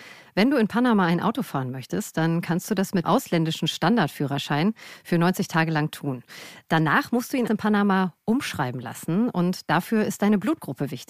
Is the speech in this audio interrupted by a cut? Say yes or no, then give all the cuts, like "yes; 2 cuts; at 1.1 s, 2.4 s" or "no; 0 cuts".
yes; 2 cuts; at 3.0 s, 7.5 s